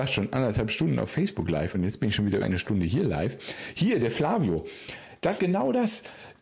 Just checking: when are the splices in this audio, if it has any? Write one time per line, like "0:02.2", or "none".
0:01.7
0:02.4
0:05.4